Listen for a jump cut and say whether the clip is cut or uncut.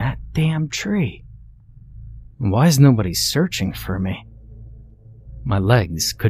uncut